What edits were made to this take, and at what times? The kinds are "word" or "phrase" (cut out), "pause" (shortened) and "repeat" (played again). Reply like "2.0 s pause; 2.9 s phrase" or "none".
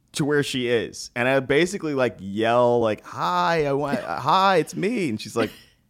none